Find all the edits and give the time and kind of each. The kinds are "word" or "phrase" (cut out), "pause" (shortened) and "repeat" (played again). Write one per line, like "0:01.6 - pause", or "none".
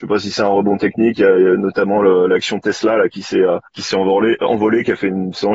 0:03.7 - pause